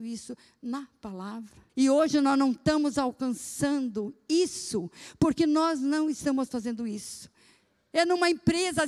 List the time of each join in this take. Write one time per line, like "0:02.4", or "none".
0:01.7